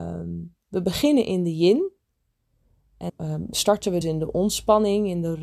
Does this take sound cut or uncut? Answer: cut